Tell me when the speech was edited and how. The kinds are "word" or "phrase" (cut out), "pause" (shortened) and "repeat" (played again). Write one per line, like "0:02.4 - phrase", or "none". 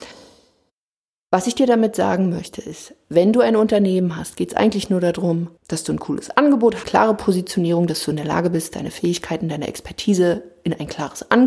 0:05.6 - pause
0:06.8 - phrase